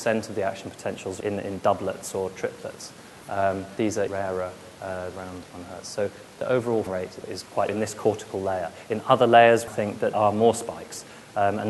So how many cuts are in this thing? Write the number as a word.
nine